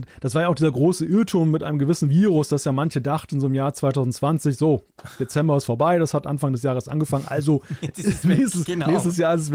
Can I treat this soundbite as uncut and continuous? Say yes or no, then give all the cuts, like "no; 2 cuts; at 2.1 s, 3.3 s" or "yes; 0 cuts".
yes; 0 cuts